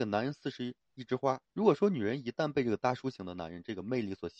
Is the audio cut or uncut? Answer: cut